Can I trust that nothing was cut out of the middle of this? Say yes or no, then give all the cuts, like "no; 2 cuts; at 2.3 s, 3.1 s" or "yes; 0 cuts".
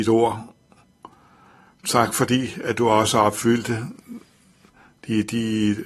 yes; 0 cuts